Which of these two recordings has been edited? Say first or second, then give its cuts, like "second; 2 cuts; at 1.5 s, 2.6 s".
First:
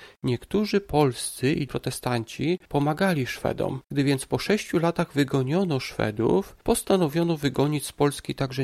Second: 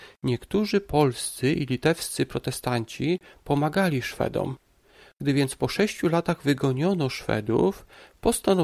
first; 4 cuts; at 1.7 s, 2.6 s, 3.8 s, 6.6 s